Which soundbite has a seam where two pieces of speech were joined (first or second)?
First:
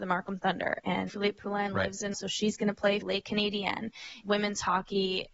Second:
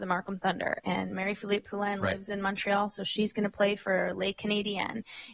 first